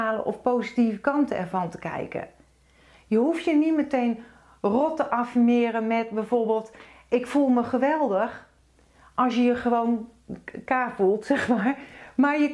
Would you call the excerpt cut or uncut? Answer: uncut